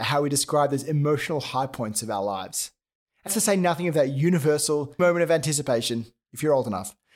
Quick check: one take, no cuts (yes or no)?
no